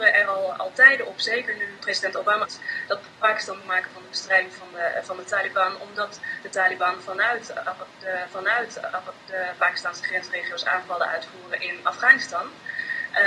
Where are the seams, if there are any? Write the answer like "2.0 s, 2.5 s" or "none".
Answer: 1.8 s, 2.4 s, 3.6 s, 8.3 s